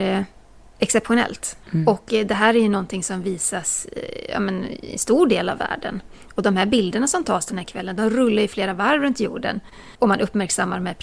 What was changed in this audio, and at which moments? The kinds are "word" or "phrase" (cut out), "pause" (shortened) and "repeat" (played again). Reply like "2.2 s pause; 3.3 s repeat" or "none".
1.6 s pause; 9.9 s pause